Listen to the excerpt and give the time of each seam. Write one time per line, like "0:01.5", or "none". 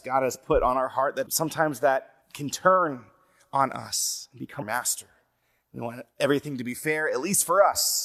0:01.3
0:02.2
0:04.6